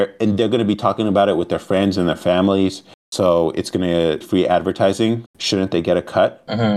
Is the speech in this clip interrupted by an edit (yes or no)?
yes